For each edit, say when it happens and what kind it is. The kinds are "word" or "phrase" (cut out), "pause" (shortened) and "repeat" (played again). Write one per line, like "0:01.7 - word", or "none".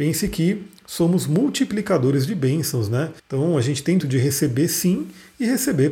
0:03.2 - pause
0:04.0 - word